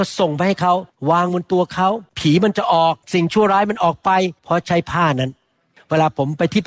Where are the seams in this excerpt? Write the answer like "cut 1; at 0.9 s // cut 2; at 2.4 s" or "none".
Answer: cut 1; at 2.1 s // cut 2; at 3.0 s // cut 3; at 4.4 s